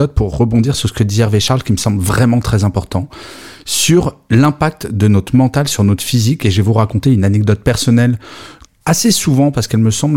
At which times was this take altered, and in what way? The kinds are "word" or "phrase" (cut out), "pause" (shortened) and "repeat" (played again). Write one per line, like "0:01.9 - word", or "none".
0:08.7 - phrase